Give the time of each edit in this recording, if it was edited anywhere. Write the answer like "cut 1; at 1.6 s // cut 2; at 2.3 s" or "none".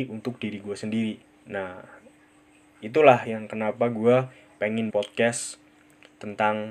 cut 1; at 1.2 s // cut 2; at 3.2 s // cut 3; at 4.9 s